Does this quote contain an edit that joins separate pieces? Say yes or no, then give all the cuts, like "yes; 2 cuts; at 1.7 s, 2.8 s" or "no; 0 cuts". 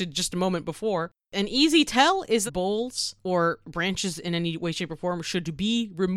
yes; 1 cut; at 2.5 s